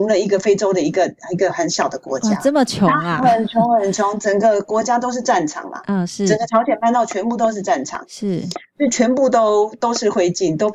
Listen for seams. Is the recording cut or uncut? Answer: uncut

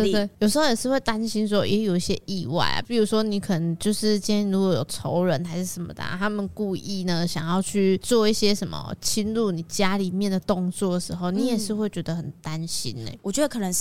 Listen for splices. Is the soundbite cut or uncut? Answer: uncut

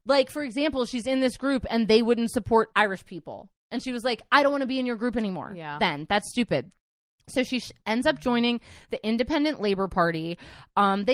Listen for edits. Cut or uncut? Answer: uncut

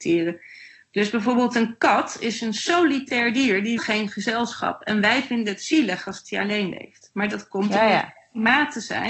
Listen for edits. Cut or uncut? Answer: cut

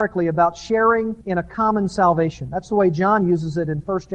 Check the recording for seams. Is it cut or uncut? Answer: cut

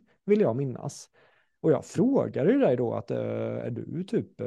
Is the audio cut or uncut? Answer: uncut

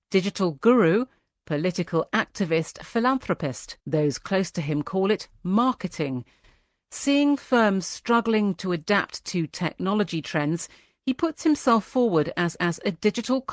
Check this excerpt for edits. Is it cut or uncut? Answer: cut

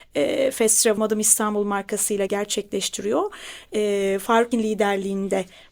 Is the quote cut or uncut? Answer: cut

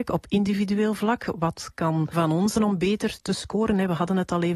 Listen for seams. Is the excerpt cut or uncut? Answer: cut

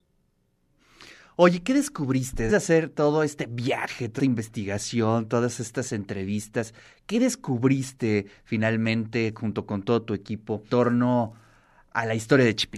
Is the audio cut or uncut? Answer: cut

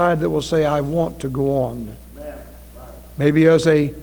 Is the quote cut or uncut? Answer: uncut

